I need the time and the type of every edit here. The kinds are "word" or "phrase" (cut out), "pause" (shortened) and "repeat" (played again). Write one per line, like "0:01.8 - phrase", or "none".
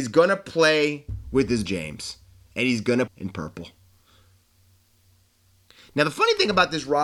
0:01.7 - phrase
0:03.1 - phrase